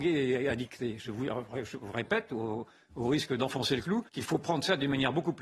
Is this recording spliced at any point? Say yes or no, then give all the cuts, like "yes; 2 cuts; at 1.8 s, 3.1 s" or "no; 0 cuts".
yes; 1 cut; at 4.1 s